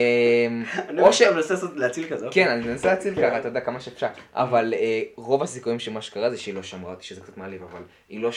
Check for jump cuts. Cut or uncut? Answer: uncut